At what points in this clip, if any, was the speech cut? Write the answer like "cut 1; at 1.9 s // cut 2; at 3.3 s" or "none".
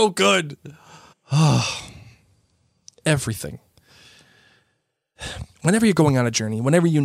cut 1; at 1.1 s // cut 2; at 5.5 s